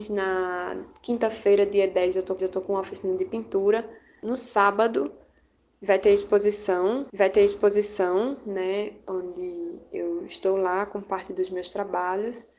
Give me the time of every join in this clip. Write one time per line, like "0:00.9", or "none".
0:02.4
0:07.1

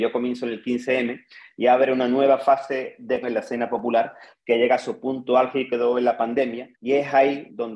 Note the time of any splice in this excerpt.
0:03.2
0:06.7

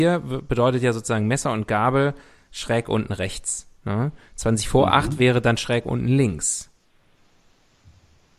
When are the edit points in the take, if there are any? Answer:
none

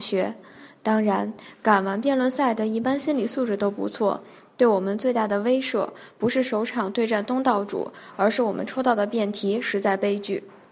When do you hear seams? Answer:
none

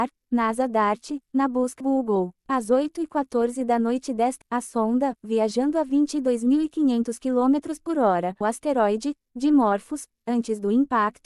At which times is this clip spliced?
0:01.8
0:02.4
0:04.4
0:08.4

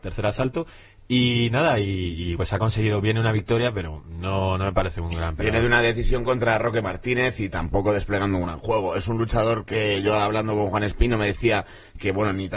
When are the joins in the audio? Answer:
0:02.4

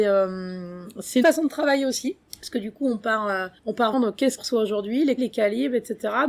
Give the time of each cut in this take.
0:01.2
0:02.2
0:03.6
0:03.9
0:04.4
0:05.2

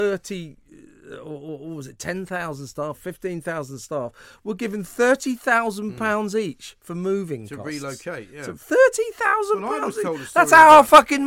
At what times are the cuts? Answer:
none

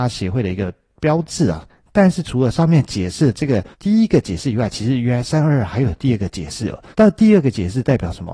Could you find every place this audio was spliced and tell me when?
0:03.7
0:06.9

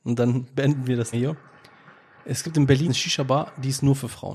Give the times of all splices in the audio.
0:01.1
0:02.9

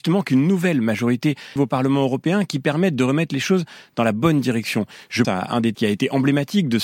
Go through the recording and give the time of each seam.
0:01.6
0:05.2
0:05.7

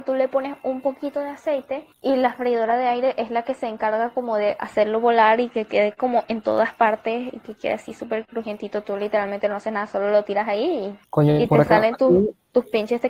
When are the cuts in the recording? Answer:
0:01.9
0:11.0

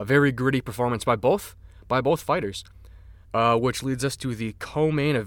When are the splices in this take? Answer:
0:03.2

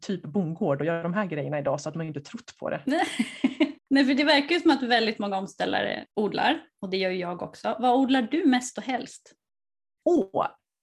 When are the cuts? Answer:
0:03.8
0:06.1

